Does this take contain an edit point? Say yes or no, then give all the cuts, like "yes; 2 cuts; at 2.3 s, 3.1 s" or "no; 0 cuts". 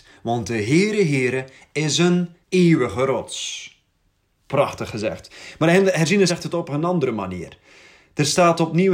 yes; 2 cuts; at 2.4 s, 6.3 s